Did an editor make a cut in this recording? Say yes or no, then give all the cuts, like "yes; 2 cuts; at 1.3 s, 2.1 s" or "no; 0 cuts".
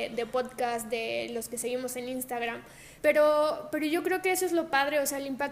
yes; 1 cut; at 3.0 s